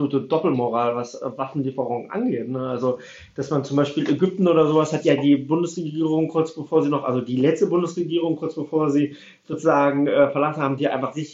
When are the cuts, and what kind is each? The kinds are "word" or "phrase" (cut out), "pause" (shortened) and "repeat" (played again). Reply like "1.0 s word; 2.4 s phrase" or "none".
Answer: none